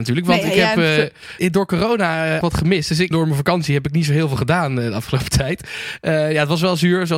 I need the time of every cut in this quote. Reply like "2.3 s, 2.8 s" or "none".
2.4 s, 3.1 s